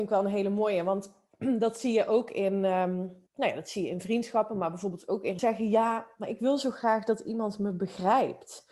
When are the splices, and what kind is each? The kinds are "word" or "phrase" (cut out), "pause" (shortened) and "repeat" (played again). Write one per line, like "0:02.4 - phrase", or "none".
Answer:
0:03.3 - pause
0:05.4 - phrase